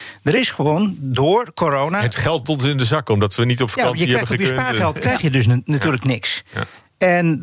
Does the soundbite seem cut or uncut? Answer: cut